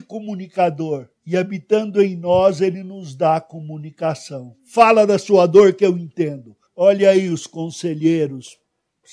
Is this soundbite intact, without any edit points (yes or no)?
no